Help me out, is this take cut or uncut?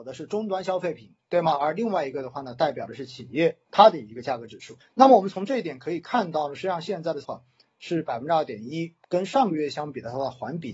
cut